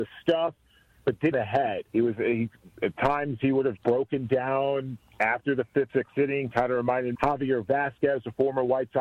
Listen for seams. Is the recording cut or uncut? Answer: cut